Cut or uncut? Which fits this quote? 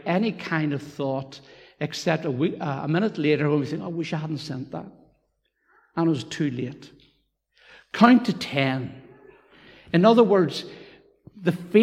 uncut